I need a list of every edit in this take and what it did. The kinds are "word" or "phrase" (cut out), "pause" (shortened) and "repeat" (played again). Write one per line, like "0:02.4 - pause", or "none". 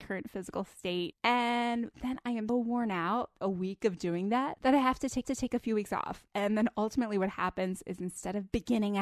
0:02.5 - word
0:03.4 - phrase
0:05.2 - repeat